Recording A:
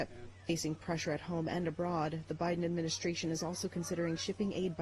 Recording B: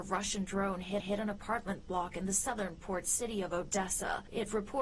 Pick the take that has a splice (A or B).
B